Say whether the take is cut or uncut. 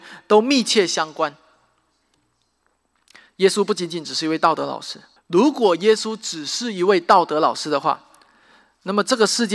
cut